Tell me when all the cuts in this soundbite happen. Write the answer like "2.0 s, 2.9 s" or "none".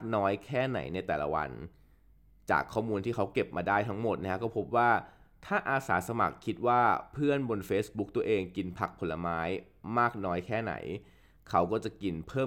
none